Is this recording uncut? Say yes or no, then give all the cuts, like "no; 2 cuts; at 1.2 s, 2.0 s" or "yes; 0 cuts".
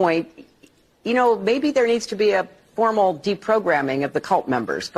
yes; 0 cuts